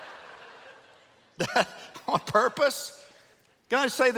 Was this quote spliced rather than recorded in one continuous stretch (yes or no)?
yes